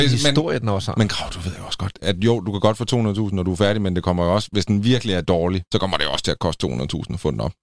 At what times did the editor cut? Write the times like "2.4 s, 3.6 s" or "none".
1.9 s, 5.7 s